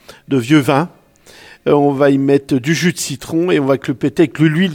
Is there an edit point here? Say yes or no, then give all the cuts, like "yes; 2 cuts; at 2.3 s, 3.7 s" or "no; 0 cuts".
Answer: no; 0 cuts